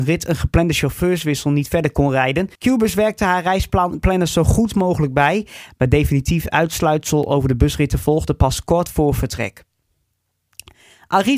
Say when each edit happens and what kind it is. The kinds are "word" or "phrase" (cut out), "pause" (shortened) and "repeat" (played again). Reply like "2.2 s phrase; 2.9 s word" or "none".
2.5 s pause